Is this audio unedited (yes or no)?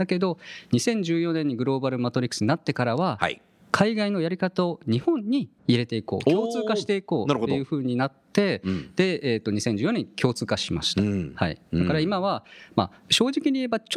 no